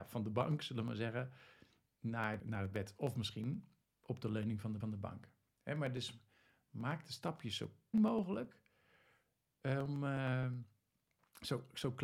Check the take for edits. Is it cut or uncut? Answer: cut